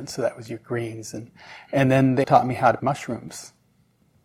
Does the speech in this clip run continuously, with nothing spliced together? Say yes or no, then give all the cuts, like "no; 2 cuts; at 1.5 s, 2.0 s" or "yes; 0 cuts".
no; 2 cuts; at 2.2 s, 2.8 s